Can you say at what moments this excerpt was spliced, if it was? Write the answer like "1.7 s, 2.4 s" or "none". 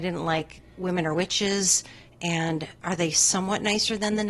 none